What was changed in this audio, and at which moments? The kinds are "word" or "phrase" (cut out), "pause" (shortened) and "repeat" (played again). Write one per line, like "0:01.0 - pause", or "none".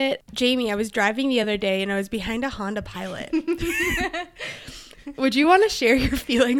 none